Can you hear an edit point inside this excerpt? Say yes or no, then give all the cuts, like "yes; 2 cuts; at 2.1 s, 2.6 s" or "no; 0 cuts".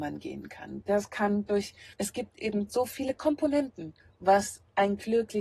yes; 2 cuts; at 1.9 s, 4.0 s